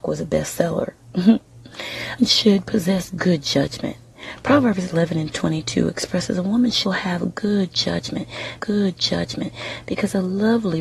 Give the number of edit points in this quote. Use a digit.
3